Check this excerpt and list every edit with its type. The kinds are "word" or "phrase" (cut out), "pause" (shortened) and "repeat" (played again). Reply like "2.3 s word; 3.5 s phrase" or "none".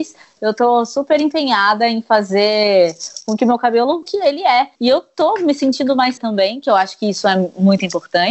4.0 s phrase; 4.8 s pause; 6.2 s word